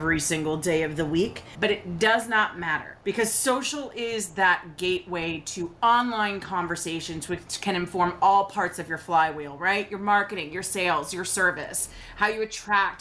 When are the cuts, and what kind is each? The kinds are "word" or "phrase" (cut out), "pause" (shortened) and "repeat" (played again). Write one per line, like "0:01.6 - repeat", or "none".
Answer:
none